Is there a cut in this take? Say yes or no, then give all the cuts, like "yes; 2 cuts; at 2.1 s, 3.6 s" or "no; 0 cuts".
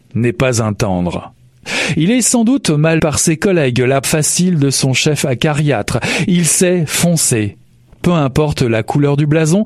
yes; 2 cuts; at 3.0 s, 4.0 s